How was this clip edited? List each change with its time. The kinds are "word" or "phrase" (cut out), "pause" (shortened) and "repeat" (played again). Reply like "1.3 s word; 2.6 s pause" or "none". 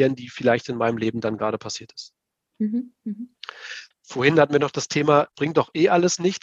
3.9 s pause; 5.4 s word